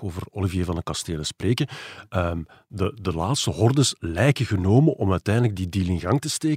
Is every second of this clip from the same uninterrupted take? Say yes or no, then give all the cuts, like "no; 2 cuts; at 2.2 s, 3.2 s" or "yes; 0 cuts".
yes; 0 cuts